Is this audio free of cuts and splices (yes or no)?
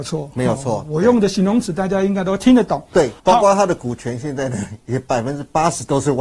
no